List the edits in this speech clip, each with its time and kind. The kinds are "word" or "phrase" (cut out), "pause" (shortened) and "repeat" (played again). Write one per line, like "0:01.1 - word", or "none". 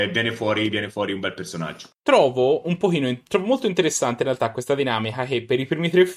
0:01.9 - pause